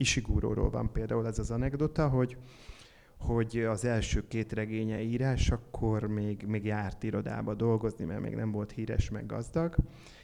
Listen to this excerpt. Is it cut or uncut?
uncut